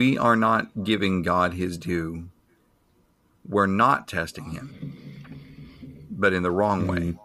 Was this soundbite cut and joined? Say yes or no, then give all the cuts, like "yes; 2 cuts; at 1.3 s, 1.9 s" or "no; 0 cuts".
no; 0 cuts